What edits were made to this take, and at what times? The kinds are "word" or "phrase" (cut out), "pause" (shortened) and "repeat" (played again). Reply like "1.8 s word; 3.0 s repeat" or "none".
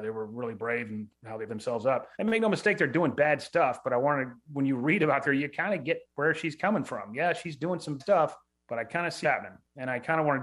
1.5 s word; 2.1 s pause; 5.2 s phrase; 8.0 s word; 8.5 s pause; 9.2 s word